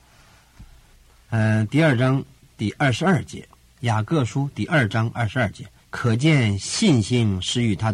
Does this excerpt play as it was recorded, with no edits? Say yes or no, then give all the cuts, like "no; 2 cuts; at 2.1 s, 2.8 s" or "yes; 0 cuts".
no; 2 cuts; at 3.5 s, 5.8 s